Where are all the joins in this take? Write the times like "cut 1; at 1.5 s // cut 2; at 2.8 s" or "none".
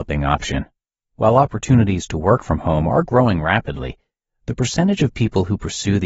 none